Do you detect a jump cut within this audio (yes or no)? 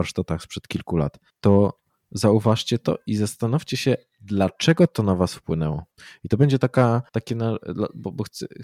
yes